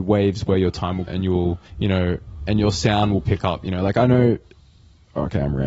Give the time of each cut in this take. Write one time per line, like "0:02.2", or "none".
0:01.1
0:01.7
0:03.2